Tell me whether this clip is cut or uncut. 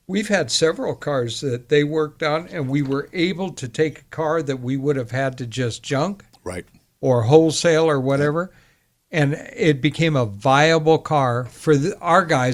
uncut